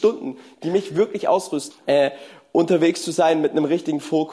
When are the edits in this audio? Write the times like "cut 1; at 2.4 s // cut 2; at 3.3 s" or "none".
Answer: cut 1; at 1.7 s